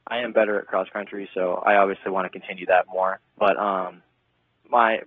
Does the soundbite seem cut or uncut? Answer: cut